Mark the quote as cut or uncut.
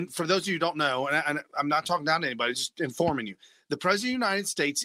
uncut